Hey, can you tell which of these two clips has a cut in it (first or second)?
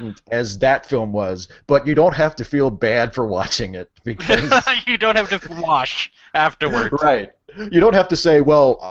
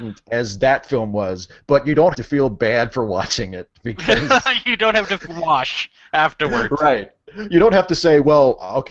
second